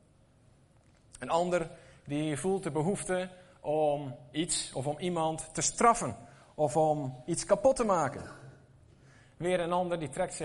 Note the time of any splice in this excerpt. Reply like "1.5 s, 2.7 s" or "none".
none